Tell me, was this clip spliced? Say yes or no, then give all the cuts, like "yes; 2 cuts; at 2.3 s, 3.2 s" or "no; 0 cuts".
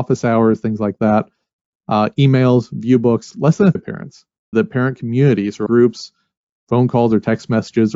yes; 4 cuts; at 3.3 s, 3.8 s, 4.5 s, 5.7 s